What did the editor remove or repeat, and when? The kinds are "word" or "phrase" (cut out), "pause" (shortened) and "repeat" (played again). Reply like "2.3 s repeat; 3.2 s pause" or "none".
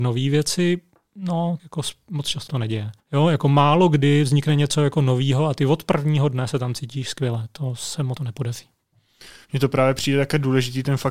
1.6 s word; 2.5 s word; 3.0 s pause; 8.2 s word

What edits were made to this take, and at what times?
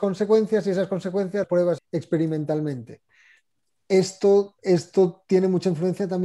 1.4 s word; 1.8 s word; 4.6 s pause

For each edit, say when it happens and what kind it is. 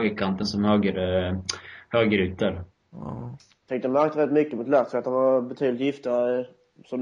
none

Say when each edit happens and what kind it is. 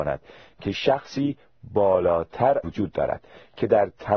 2.6 s phrase

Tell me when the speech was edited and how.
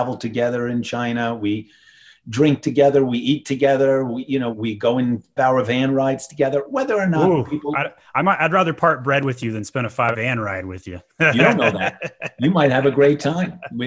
4.5 s word; 5.4 s word; 10.1 s word

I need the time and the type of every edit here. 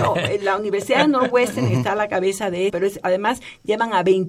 2.7 s word

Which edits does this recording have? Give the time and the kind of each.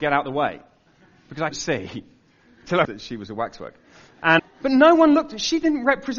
1.5 s word; 2.9 s word; 4.4 s word

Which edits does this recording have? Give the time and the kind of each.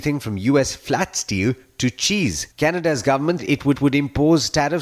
2.5 s pause; 3.4 s word; 3.7 s repeat

